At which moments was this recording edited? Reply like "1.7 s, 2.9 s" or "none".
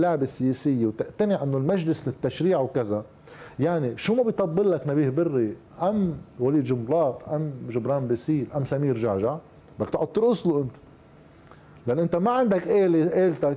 none

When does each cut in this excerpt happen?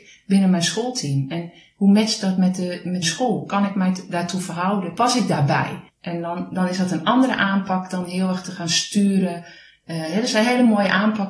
3.0 s

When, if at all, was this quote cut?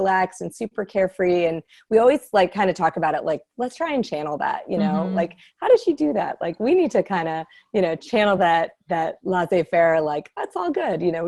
none

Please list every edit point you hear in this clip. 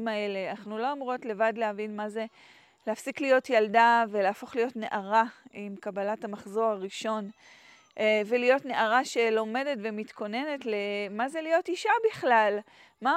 none

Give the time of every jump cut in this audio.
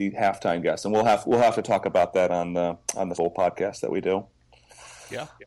3.1 s

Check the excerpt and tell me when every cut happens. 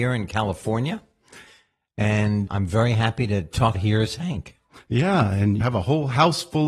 2.5 s, 3.7 s, 5.6 s

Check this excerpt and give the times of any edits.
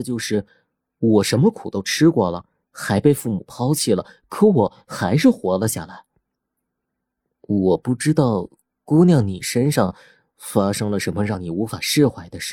none

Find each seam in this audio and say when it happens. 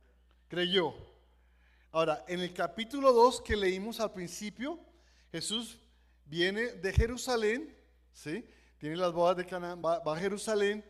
none

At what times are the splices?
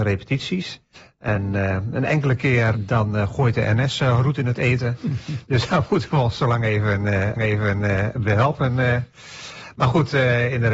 0.9 s, 2.7 s, 7.4 s

